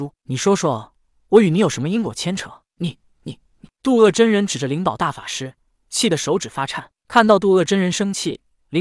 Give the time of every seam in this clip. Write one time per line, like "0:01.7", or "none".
none